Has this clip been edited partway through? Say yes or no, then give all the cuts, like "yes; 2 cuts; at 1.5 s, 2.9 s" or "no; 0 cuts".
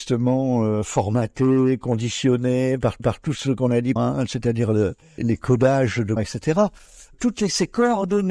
yes; 4 cuts; at 3.0 s, 4.0 s, 5.2 s, 6.2 s